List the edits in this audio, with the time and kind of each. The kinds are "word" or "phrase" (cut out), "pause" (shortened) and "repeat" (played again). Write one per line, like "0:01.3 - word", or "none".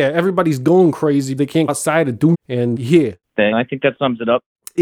0:01.4 - word
0:01.7 - word
0:02.3 - word
0:02.8 - word
0:03.5 - word

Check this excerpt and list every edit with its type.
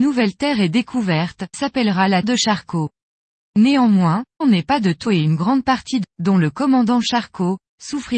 0:01.5 - word
0:02.2 - word
0:04.4 - word
0:05.1 - word
0:06.0 - word

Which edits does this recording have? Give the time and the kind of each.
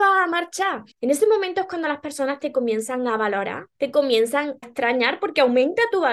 0:00.9 - pause
0:03.7 - pause
0:04.6 - word

